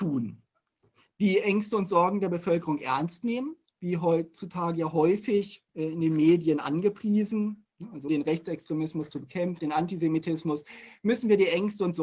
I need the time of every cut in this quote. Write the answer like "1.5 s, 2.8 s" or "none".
5.7 s, 8.1 s, 9.6 s